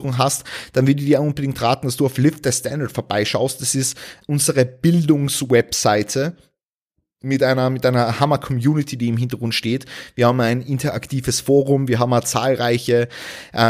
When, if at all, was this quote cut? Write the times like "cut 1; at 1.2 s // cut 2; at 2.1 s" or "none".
cut 1; at 4.2 s